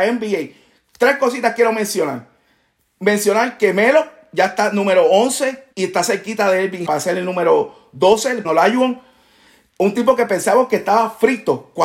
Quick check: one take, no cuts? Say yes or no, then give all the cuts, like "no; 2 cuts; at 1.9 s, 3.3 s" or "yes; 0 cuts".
no; 3 cuts; at 5.7 s, 6.9 s, 8.4 s